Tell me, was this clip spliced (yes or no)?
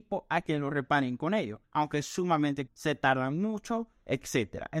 yes